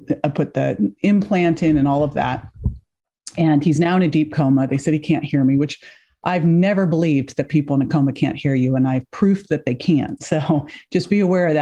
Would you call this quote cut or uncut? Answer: uncut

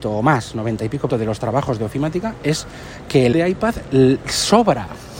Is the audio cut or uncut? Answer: cut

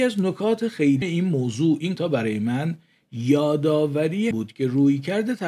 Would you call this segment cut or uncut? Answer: cut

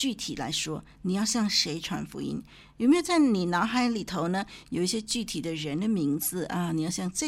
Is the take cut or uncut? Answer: uncut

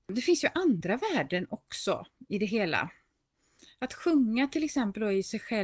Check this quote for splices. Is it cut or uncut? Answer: uncut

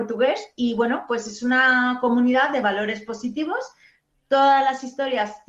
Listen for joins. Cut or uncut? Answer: uncut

